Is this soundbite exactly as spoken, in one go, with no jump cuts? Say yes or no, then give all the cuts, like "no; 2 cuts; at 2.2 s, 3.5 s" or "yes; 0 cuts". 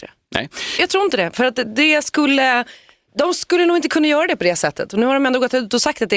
yes; 0 cuts